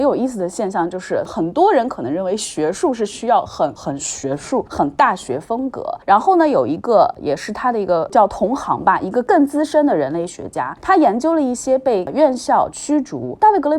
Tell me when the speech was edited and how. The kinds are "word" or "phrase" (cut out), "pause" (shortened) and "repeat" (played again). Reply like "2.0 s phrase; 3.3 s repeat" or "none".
3.8 s word

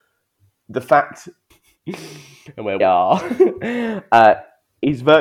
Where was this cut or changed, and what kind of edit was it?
1.5 s phrase; 2.8 s word

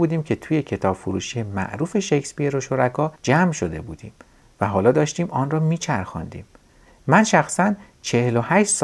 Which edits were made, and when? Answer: 3.2 s pause

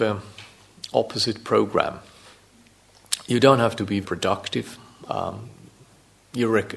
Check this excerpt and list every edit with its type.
4.0 s word

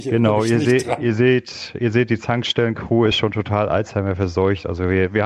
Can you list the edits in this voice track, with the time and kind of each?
none

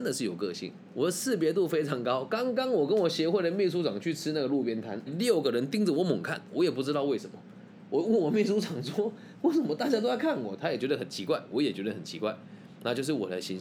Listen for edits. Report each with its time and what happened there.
5.1 s phrase

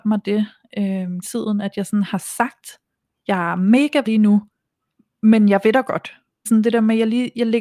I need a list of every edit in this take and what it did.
1.2 s word; 4.1 s word; 6.5 s word

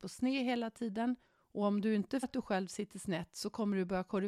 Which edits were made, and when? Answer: 1.2 s pause; 2.2 s word

